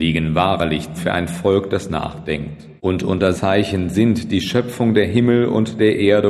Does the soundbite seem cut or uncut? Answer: cut